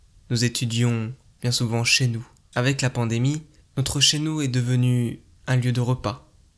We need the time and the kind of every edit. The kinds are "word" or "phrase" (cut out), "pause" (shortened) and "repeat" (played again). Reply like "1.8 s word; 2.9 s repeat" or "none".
1.3 s pause; 2.4 s pause; 3.6 s pause

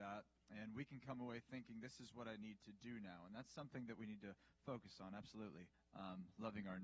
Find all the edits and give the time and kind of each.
5.7 s pause

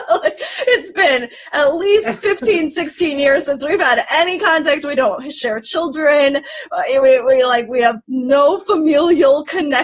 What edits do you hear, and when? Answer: 8.0 s pause

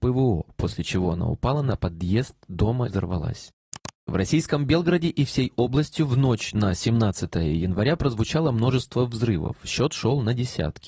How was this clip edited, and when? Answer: 2.9 s word

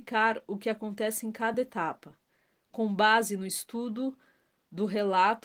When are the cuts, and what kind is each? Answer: none

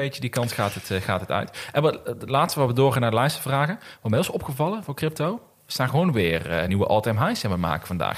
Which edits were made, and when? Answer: none

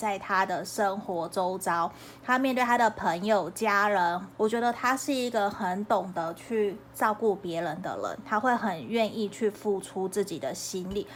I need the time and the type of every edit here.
4.3 s phrase

